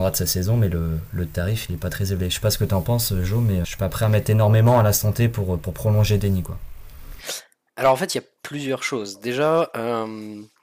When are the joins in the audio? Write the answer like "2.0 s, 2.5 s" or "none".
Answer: 3.6 s

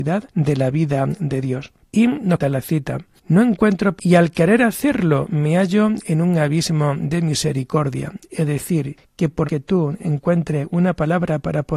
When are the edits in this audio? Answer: 2.4 s, 4.0 s, 9.4 s

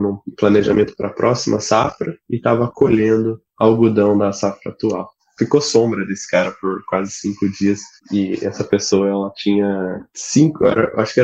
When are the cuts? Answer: 3.5 s

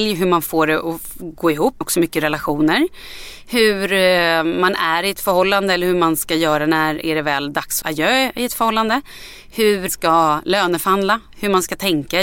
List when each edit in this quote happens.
1.8 s, 7.8 s, 9.9 s

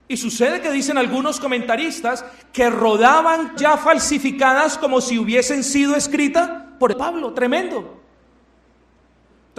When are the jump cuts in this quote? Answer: 3.6 s, 6.9 s

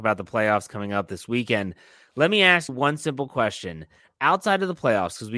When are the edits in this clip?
2.7 s

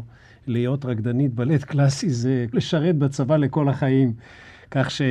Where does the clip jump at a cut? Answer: 2.5 s

